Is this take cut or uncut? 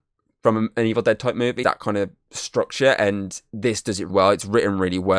cut